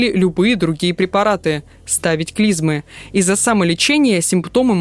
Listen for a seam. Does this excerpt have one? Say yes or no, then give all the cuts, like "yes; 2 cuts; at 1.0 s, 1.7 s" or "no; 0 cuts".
no; 0 cuts